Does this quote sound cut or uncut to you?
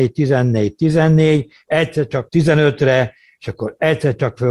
cut